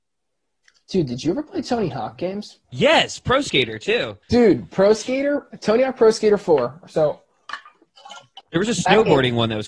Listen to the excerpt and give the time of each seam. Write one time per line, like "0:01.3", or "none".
0:02.6
0:04.2